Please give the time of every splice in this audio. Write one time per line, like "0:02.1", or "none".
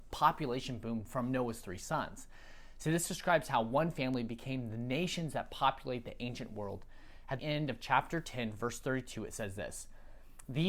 0:07.4